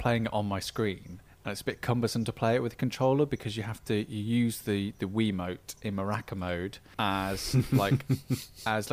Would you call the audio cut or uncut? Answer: uncut